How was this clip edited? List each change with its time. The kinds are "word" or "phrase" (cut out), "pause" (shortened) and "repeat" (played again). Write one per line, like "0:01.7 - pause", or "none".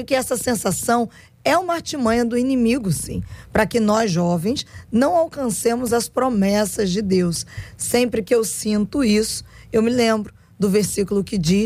none